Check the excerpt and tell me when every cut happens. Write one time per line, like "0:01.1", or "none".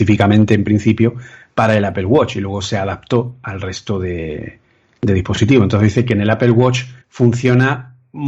0:07.0